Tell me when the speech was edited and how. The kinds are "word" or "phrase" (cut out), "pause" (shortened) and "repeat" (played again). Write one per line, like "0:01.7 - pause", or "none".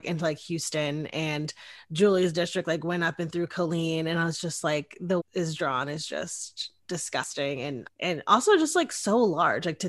0:05.2 - phrase
0:06.8 - pause
0:07.9 - phrase